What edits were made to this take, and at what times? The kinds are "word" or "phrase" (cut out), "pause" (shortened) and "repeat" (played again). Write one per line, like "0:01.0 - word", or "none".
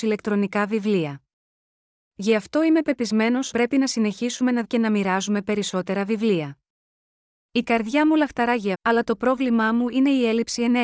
0:03.5 - word
0:04.6 - word
0:08.7 - word